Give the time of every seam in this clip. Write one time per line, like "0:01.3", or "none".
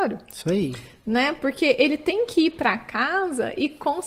none